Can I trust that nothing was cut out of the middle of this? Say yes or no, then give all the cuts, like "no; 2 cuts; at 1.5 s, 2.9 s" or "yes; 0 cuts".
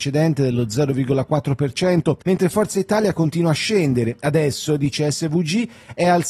no; 1 cut; at 2.2 s